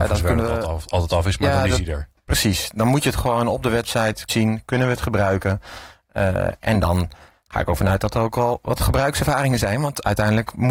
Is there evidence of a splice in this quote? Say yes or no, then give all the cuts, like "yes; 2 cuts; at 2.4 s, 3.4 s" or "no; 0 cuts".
yes; 1 cut; at 4.3 s